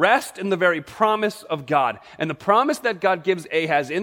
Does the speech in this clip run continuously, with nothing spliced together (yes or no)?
yes